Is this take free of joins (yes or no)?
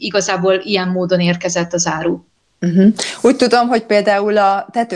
yes